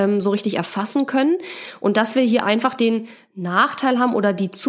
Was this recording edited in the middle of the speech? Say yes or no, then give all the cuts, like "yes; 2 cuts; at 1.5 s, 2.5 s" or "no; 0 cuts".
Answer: no; 0 cuts